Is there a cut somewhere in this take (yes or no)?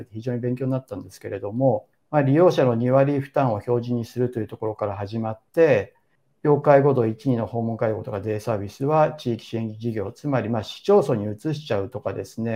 yes